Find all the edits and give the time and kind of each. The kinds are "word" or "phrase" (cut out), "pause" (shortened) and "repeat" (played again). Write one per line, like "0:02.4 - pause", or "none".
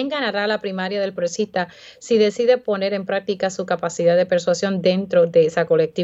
0:01.2 - phrase